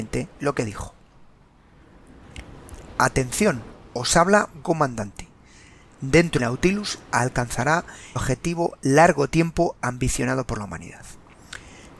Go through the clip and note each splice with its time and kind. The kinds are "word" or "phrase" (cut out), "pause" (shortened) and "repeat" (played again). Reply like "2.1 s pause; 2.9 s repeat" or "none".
4.6 s word; 6.4 s phrase; 8.2 s word

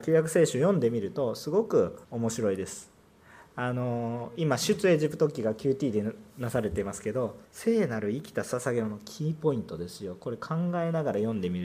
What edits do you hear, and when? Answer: 2.0 s pause; 7.4 s pause

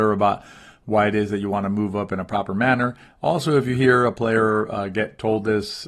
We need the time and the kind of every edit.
none

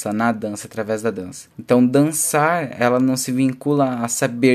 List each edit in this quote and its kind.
1.5 s pause

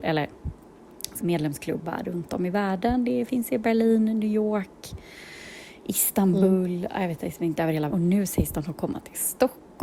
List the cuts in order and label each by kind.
1.2 s phrase; 7.9 s word

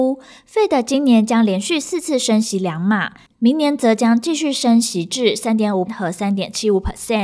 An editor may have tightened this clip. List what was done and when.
5.9 s word

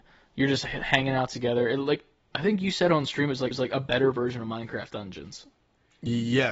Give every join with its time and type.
3.5 s repeat

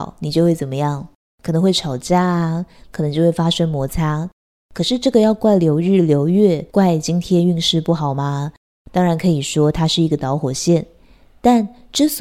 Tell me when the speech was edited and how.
6.7 s pause

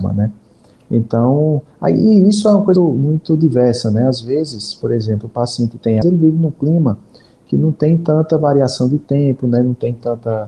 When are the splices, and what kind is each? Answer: 2.8 s word; 6.0 s phrase

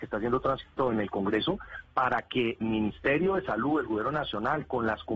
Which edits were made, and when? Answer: 2.6 s word

